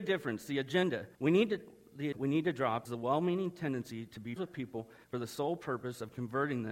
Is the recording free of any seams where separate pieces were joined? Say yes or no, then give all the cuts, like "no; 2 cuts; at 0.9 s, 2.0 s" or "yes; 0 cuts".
no; 5 cuts; at 1.1 s, 2.1 s, 2.9 s, 4.4 s, 5.0 s